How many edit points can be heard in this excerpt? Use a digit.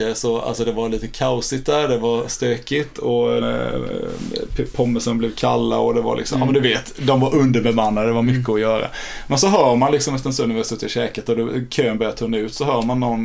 1